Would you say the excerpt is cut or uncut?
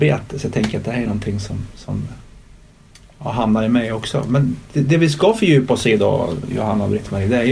uncut